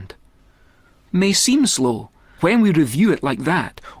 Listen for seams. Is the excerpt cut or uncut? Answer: cut